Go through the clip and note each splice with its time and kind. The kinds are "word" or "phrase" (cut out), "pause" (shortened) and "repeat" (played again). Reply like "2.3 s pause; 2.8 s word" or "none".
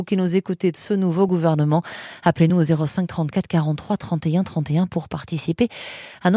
none